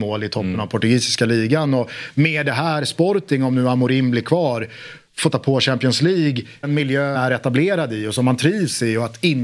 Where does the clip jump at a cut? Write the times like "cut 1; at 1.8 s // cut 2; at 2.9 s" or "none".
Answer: cut 1; at 5.3 s // cut 2; at 6.6 s // cut 3; at 7.1 s